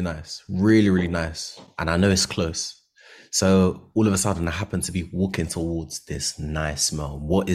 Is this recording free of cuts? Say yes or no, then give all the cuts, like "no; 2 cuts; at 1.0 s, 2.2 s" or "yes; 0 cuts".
yes; 0 cuts